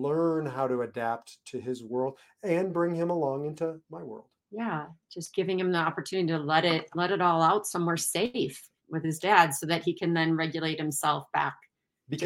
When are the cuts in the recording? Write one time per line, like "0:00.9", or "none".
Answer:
0:03.8
0:04.4